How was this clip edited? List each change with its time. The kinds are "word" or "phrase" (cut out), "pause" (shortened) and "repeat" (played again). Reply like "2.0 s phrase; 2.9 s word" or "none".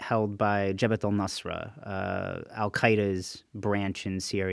none